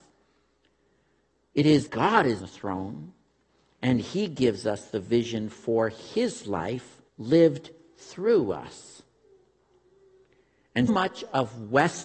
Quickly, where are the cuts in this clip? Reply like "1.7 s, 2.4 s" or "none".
1.9 s, 2.4 s, 7.1 s, 10.9 s